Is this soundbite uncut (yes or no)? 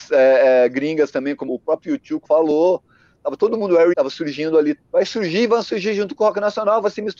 no